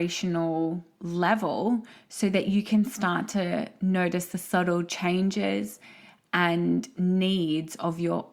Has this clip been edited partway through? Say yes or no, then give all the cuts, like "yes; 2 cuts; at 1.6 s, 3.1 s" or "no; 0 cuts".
no; 0 cuts